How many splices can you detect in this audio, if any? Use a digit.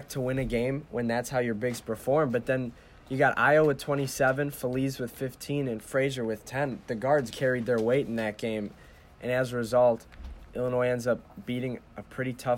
1